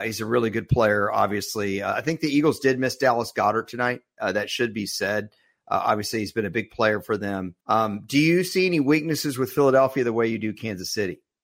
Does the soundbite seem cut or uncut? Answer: cut